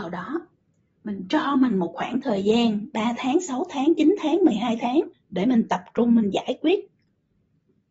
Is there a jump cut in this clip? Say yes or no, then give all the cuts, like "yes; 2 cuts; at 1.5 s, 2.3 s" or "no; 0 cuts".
yes; 1 cut; at 5.1 s